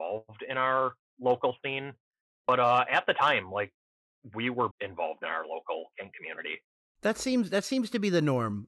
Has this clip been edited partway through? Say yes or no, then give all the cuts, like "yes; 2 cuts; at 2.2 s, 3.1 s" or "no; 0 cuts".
yes; 1 cut; at 4.7 s